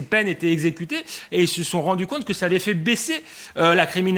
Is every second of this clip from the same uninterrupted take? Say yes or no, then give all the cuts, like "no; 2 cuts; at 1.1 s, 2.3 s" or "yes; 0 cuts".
yes; 0 cuts